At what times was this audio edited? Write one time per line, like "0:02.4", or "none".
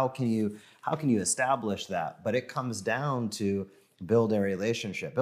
none

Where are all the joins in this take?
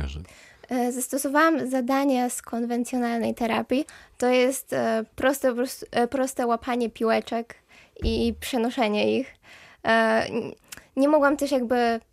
none

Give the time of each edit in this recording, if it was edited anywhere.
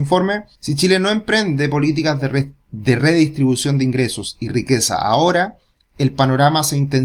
none

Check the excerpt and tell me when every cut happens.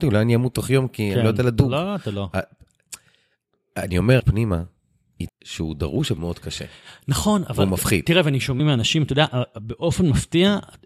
0:04.2
0:05.3
0:06.2
0:08.6

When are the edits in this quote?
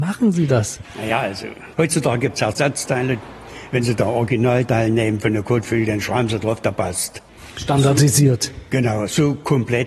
none

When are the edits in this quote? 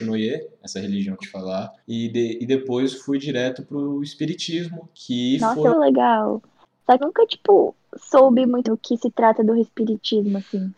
0:01.2
0:01.8
0:04.9
0:05.7
0:07.0
0:08.6

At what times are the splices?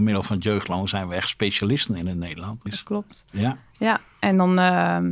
0:02.7

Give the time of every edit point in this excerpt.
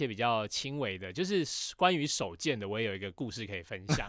none

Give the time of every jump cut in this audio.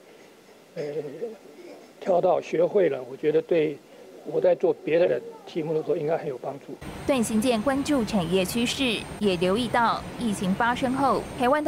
0:05.1

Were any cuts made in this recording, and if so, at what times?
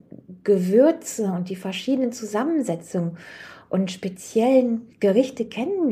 0:04.9

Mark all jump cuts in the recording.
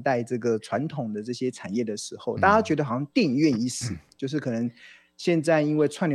none

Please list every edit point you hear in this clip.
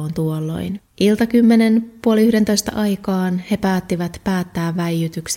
0:00.9

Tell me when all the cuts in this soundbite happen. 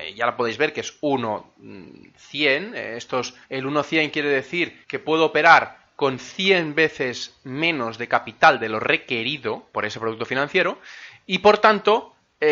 0:03.4
0:04.8
0:09.7

